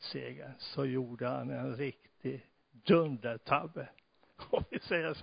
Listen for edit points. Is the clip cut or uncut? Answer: uncut